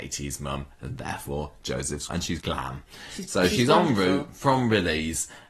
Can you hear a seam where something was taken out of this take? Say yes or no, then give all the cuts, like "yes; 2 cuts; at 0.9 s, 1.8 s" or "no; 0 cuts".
yes; 2 cuts; at 2.1 s, 2.4 s